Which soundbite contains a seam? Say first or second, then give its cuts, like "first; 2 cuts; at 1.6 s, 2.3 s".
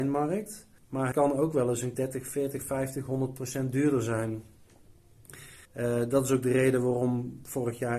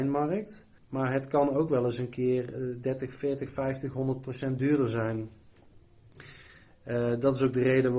first; 3 cuts; at 1.1 s, 1.9 s, 5.6 s